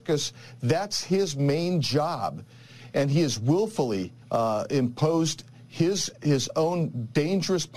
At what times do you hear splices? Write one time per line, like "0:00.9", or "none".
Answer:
0:04.2